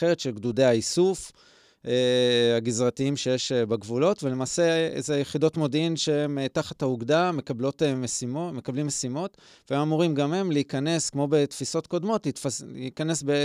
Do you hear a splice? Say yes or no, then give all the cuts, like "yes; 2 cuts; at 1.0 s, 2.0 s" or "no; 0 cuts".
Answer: no; 0 cuts